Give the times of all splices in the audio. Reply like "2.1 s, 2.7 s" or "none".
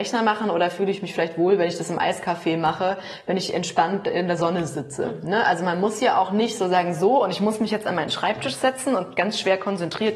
none